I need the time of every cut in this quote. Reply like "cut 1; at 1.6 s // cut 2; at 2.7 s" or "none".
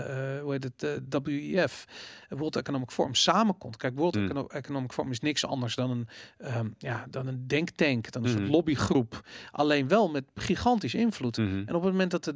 none